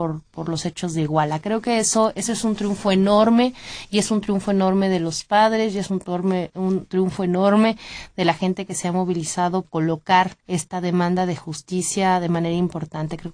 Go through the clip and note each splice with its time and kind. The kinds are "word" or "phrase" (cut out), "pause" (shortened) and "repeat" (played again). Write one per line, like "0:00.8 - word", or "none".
0:09.6 - word
0:10.4 - pause

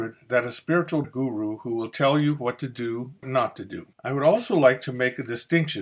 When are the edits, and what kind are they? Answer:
0:01.0 - phrase
0:03.2 - phrase
0:03.9 - pause

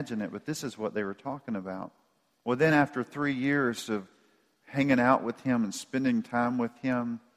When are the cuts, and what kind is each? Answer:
none

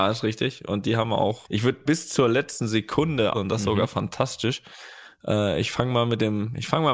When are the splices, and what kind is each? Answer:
0:01.4 - word
0:01.8 - word
0:03.3 - word

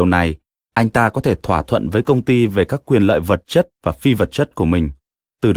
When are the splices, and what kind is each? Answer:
none

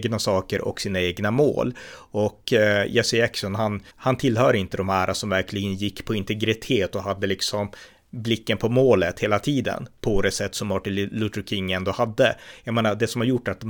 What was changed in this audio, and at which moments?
0:03.9 - pause

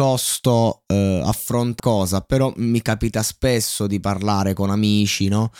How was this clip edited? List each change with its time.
0:01.8 - word

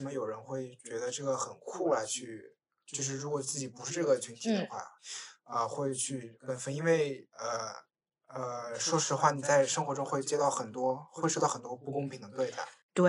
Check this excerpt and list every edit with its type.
none

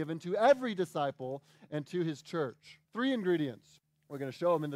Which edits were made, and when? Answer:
0:02.8 - pause
0:03.8 - pause

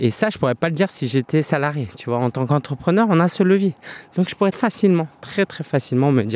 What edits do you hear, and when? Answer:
0:04.5 - word
0:05.5 - word

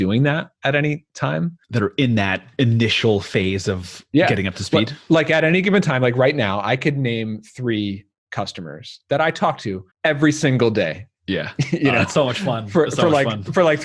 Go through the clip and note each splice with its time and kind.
0:01.6 - pause
0:09.9 - pause

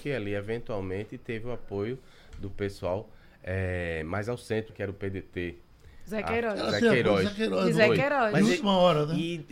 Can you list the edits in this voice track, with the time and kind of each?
0:04.7 - word

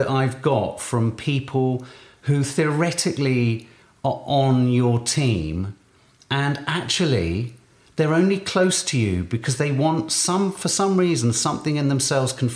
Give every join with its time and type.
none

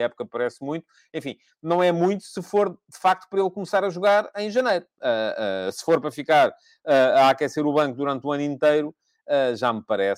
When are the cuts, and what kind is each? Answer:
none

